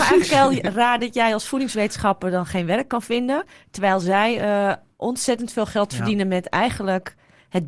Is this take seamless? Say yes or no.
yes